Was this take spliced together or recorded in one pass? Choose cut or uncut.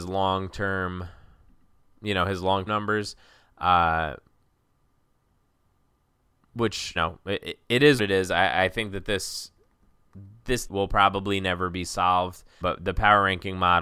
cut